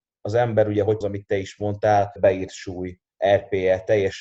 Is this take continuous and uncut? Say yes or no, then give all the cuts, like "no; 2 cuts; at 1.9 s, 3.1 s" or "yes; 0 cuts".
no; 2 cuts; at 1.0 s, 2.2 s